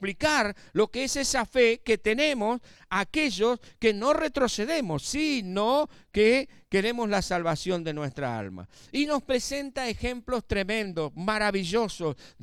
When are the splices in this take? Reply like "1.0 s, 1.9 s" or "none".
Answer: none